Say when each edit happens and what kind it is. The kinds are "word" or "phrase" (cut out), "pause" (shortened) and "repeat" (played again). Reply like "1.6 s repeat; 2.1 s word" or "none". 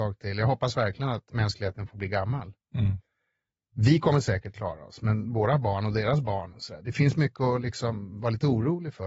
none